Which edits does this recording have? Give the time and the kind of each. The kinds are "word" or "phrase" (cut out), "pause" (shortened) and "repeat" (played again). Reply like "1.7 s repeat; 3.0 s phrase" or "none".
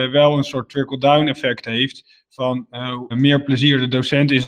3.1 s word